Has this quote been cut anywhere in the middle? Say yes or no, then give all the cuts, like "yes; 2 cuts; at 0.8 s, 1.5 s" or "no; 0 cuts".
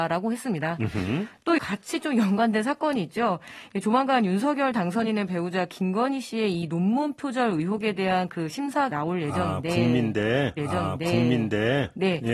yes; 3 cuts; at 1.6 s, 8.9 s, 10.6 s